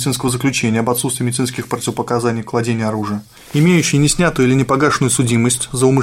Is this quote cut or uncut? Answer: uncut